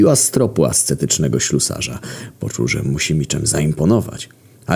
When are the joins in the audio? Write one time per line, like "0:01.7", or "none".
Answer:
none